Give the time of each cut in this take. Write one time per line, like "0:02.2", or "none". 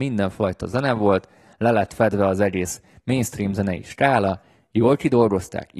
none